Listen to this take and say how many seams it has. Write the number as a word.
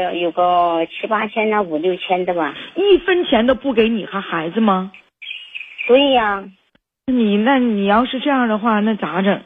one